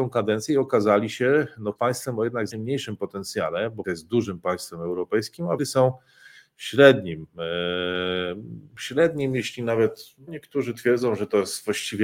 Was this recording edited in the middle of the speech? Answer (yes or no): yes